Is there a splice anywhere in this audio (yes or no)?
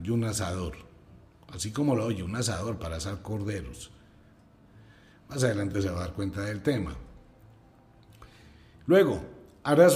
no